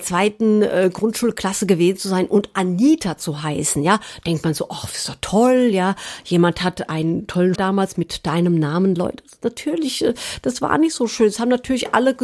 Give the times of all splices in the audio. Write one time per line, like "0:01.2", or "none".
0:07.6